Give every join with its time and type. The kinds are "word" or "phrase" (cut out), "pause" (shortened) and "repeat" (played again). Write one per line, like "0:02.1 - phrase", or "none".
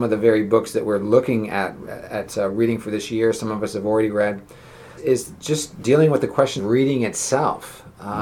0:05.0 - word
0:06.6 - word